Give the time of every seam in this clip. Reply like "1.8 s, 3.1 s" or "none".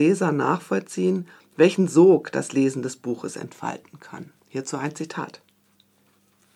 4.4 s